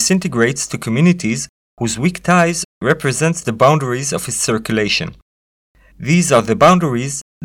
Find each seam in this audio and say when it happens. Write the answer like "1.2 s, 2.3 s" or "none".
none